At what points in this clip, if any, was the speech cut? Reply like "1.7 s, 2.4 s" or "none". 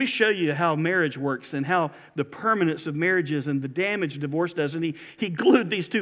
none